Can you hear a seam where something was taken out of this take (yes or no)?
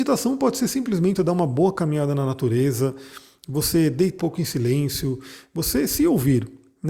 yes